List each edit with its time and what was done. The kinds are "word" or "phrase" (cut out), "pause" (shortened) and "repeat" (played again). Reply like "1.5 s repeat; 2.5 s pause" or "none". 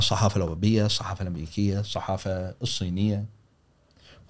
none